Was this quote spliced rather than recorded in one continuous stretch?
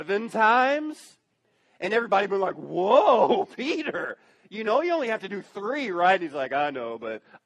no; 0 cuts

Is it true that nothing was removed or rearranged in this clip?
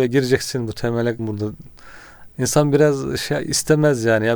no; 1 cut; at 1.2 s

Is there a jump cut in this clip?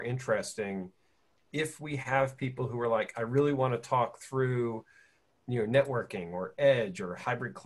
no; 0 cuts

